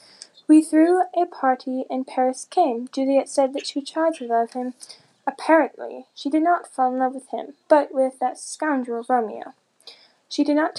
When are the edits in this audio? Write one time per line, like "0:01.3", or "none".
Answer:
0:07.6